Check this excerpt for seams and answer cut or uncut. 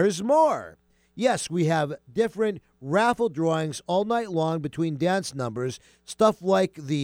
uncut